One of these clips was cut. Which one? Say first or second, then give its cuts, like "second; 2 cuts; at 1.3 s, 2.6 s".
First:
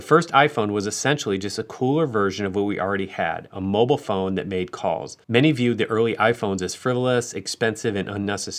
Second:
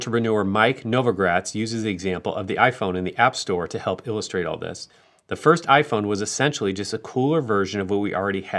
first; 1 cut; at 5.2 s